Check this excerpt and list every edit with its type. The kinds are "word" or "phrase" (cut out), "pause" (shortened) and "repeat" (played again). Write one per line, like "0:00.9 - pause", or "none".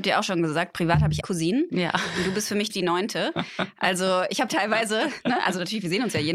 0:01.2 - word
0:02.7 - word
0:04.5 - phrase